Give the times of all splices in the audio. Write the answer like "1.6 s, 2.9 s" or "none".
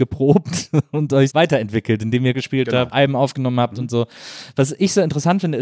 1.3 s, 2.3 s, 2.9 s